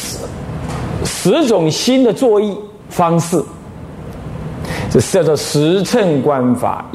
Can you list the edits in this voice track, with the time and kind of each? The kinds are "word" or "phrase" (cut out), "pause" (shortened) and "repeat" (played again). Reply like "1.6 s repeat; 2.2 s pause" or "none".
2.8 s pause